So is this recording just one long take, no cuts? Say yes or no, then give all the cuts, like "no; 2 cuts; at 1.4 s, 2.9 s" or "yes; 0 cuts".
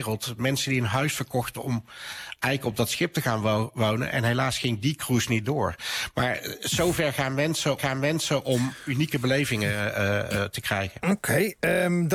no; 1 cut; at 7.8 s